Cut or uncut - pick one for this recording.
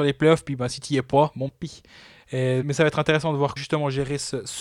cut